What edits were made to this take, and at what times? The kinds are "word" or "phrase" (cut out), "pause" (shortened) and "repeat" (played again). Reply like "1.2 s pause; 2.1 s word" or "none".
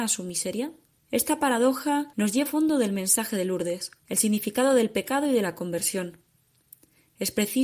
0.9 s pause; 2.1 s pause; 2.5 s word; 4.0 s pause